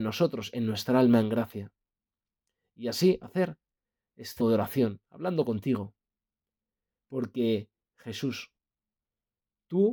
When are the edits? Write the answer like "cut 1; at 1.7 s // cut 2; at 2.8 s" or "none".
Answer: cut 1; at 4.4 s